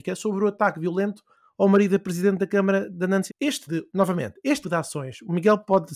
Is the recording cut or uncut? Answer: cut